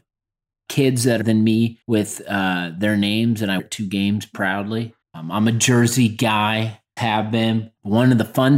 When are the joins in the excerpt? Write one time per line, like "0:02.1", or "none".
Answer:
0:01.2
0:01.8
0:03.6
0:05.0
0:07.0